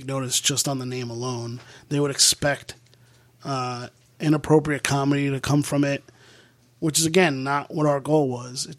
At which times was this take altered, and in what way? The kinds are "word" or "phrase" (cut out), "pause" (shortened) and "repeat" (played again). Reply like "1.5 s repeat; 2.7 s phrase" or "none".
none